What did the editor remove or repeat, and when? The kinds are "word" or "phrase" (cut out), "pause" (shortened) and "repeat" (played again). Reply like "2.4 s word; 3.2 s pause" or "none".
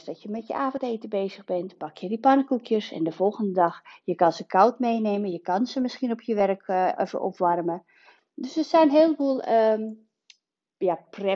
none